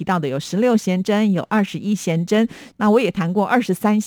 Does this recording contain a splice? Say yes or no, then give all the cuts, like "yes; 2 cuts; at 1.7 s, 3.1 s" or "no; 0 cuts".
no; 0 cuts